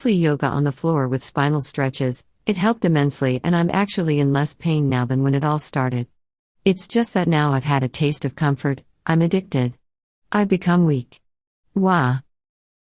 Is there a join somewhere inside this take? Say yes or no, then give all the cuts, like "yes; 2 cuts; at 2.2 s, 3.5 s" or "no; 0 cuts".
no; 0 cuts